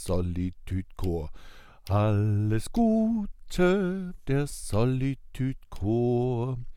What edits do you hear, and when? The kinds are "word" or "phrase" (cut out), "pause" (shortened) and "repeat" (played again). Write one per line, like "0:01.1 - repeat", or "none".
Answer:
0:04.2 - word